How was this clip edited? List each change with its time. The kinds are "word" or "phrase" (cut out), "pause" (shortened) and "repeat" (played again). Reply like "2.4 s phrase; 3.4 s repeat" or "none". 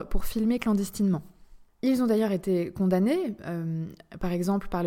1.7 s pause

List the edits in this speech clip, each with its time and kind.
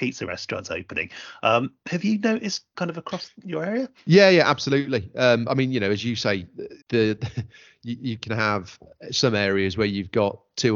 2.7 s word; 6.8 s pause

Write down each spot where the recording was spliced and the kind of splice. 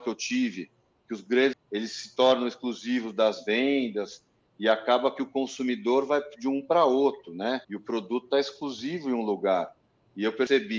1.5 s phrase; 7.6 s pause

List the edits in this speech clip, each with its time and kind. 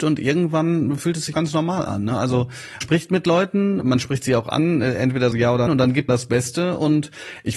1.3 s word; 2.8 s word; 3.8 s word; 5.3 s word; 5.7 s word; 6.1 s word

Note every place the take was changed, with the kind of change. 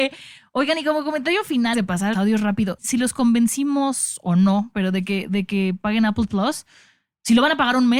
1.7 s word; 2.1 s word; 2.8 s word; 6.3 s word

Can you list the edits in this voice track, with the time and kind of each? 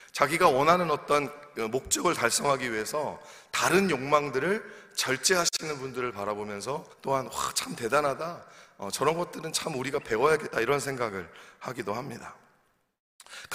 6.9 s pause

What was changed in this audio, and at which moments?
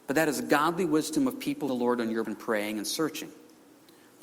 1.7 s word; 2.2 s word

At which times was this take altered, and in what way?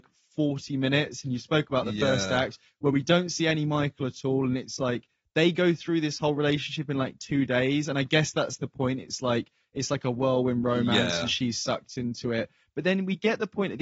none

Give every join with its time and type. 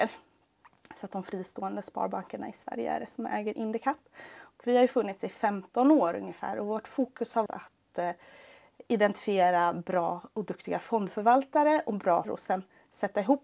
7.5 s word; 12.2 s word

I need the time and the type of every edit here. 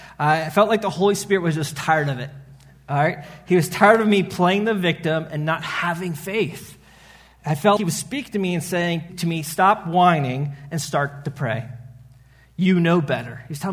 7.8 s word; 9.1 s word

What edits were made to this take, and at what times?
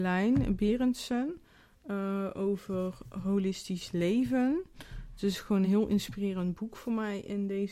none

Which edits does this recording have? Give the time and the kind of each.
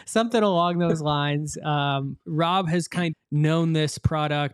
2.2 s word; 3.1 s word

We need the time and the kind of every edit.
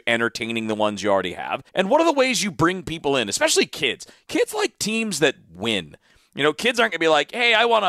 1.7 s pause

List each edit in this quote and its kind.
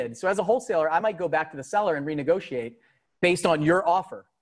none

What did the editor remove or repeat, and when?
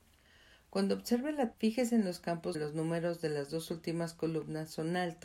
1.5 s word; 2.5 s word

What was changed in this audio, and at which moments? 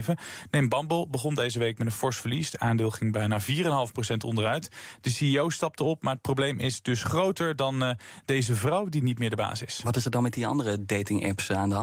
none

